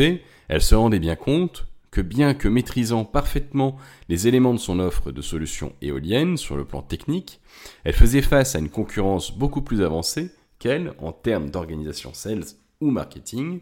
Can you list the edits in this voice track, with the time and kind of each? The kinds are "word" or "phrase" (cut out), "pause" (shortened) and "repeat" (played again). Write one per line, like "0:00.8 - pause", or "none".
none